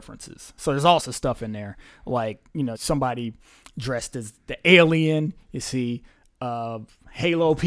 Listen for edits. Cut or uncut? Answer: cut